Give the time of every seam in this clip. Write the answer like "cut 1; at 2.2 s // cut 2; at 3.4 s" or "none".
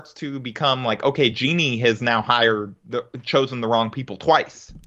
none